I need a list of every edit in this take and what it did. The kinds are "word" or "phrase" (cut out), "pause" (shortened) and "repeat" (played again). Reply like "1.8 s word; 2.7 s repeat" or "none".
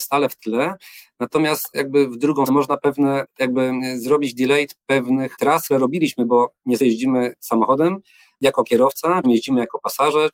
2.5 s word; 5.7 s word; 6.8 s word; 9.2 s word